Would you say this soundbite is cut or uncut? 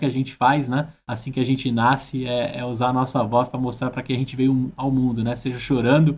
uncut